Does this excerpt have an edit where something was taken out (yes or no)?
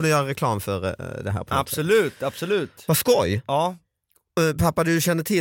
no